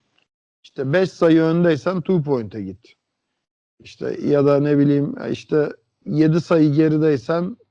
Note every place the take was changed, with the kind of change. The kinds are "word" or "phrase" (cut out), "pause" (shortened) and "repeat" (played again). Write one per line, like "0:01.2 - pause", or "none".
none